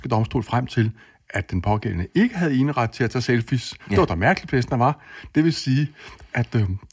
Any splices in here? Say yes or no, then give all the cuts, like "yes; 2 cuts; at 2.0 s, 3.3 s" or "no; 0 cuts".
no; 0 cuts